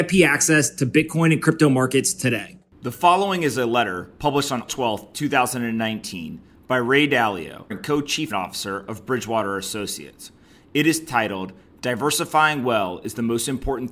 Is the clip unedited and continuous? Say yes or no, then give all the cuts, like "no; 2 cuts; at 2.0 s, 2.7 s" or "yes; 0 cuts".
no; 3 cuts; at 4.7 s, 7.7 s, 8.3 s